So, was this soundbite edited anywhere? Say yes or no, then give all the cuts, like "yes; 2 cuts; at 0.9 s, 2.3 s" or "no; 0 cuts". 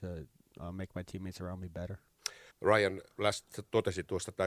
yes; 1 cut; at 2.5 s